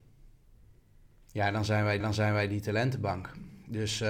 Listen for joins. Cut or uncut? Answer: cut